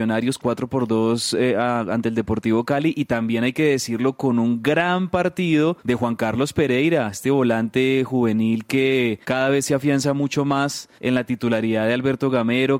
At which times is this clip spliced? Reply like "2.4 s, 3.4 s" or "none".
5.8 s, 9.2 s, 11.0 s